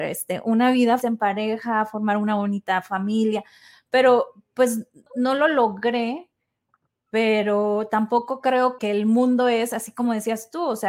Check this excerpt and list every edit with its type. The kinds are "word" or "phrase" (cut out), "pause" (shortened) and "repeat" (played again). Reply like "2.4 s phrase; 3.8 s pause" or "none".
1.0 s word; 5.1 s word; 8.8 s word